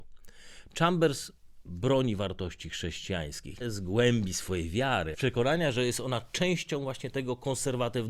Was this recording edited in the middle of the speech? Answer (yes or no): yes